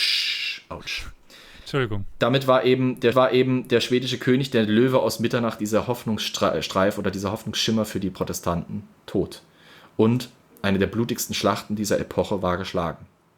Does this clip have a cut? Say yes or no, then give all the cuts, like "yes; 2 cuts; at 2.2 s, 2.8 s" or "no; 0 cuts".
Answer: yes; 1 cut; at 3.1 s